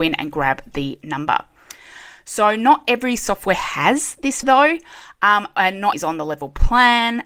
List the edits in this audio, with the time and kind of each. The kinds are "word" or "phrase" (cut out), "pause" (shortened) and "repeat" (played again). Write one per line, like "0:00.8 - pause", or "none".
0:04.4 - word
0:05.9 - word